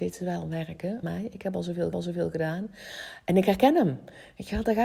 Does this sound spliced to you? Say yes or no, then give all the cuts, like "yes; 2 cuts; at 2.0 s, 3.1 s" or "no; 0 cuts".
yes; 2 cuts; at 1.0 s, 1.9 s